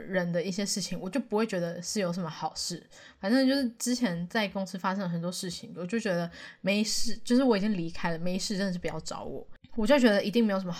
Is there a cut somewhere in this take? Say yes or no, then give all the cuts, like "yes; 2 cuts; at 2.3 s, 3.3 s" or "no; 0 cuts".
no; 0 cuts